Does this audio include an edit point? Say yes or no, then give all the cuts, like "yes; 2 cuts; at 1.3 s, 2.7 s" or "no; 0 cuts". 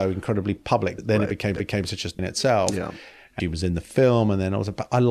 yes; 4 cuts; at 1.0 s, 1.6 s, 2.2 s, 3.4 s